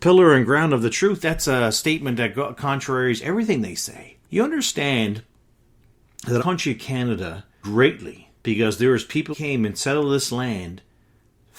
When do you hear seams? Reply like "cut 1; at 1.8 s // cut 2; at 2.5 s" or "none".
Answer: cut 1; at 1.2 s // cut 2; at 4.2 s // cut 3; at 6.4 s // cut 4; at 7.6 s // cut 5; at 8.4 s // cut 6; at 9.3 s